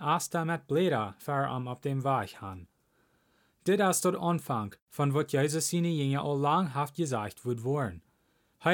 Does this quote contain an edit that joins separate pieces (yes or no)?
no